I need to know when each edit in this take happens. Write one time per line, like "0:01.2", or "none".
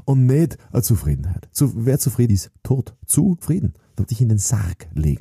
0:02.3
0:03.4
0:04.1

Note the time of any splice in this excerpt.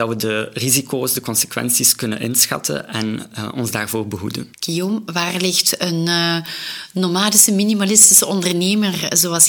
0:04.5

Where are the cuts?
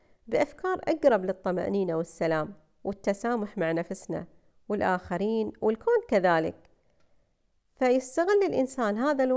none

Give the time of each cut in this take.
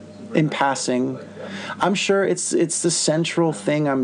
none

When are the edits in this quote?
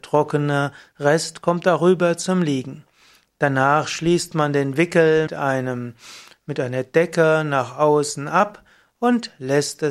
0:05.3

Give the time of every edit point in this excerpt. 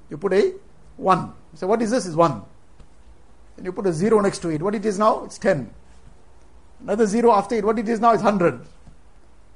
none

